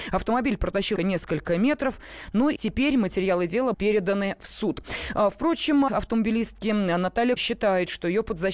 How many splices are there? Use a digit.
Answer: 5